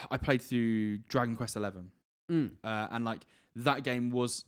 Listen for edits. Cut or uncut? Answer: uncut